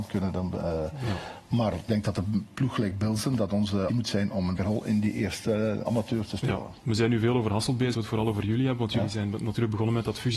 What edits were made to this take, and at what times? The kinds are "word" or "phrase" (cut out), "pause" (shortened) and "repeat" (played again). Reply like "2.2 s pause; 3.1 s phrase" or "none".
1.9 s word; 3.9 s word; 4.6 s word; 5.9 s word; 7.9 s word